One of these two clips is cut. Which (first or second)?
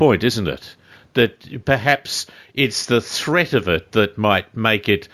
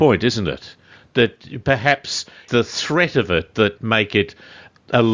second